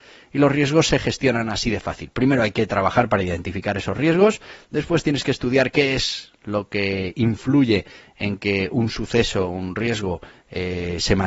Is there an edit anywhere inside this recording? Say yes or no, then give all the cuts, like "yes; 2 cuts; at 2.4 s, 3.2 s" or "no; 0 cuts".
no; 0 cuts